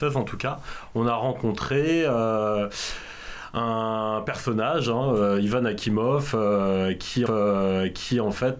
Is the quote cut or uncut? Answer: cut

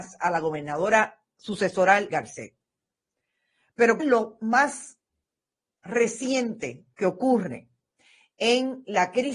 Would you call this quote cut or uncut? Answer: cut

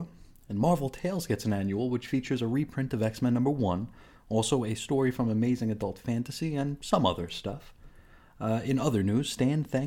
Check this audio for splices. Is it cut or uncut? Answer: uncut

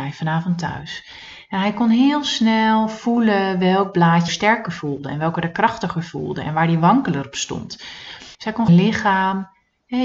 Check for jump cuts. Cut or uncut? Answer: cut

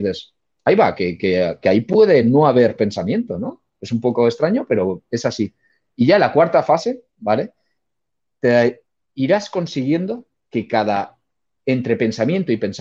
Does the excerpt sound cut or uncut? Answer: uncut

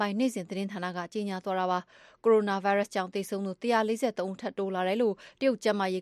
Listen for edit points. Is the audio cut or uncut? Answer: uncut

